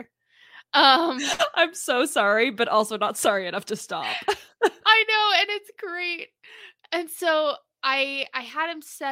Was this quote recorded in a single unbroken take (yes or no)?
yes